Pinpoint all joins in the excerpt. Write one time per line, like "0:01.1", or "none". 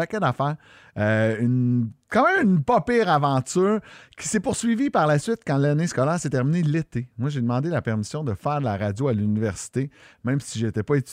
none